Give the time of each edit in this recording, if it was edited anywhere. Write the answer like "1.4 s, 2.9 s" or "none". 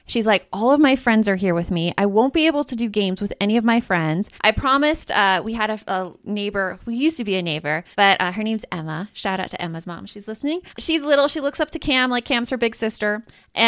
4.4 s, 7.9 s, 10.7 s